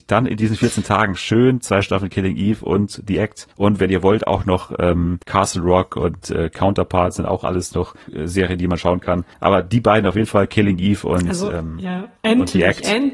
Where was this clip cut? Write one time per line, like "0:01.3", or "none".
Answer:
0:03.5
0:05.2
0:08.0
0:09.3
0:12.2

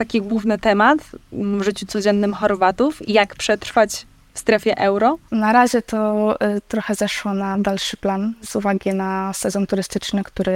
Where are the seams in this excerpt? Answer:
none

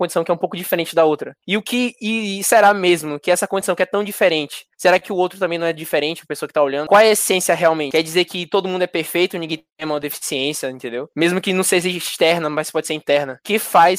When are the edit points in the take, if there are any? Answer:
0:01.4
0:04.7
0:09.7

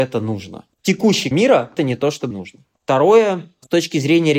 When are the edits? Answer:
0:01.3
0:01.8
0:02.3

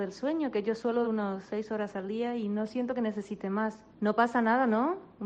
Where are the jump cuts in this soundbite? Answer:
0:01.0
0:03.9

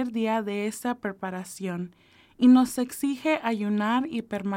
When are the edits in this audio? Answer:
none

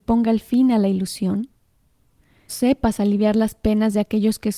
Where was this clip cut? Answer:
0:02.5

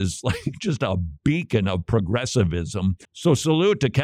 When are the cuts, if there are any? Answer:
0:03.0

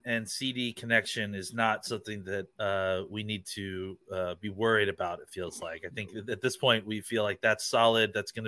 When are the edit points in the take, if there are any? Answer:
none

